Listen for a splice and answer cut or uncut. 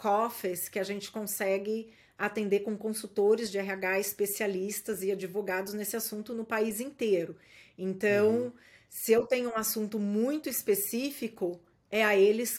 uncut